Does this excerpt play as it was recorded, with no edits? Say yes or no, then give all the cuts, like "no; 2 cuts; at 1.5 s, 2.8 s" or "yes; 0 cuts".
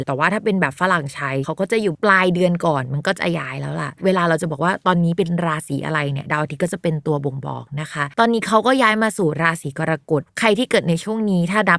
no; 1 cut; at 8.1 s